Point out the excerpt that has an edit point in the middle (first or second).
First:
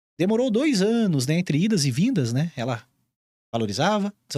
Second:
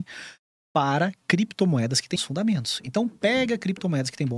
second